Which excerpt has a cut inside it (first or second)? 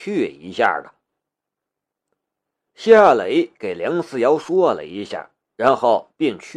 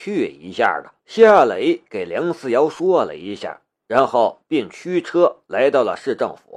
second